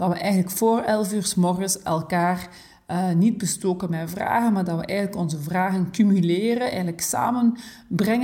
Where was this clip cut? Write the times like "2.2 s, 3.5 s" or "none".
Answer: none